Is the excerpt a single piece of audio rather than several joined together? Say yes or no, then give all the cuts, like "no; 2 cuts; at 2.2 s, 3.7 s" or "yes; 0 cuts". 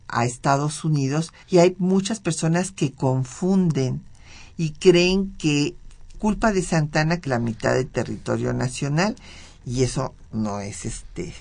no; 3 cuts; at 1.4 s, 6.1 s, 7.2 s